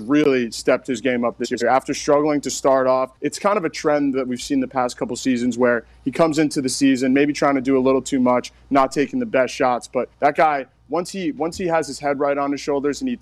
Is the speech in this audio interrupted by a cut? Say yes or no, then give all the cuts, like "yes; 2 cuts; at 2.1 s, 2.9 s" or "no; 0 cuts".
yes; 2 cuts; at 3.2 s, 10.1 s